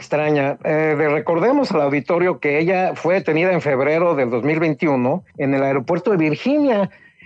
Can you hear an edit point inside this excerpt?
yes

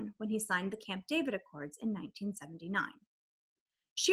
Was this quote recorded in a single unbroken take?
yes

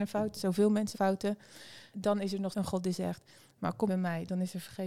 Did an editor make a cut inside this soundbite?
yes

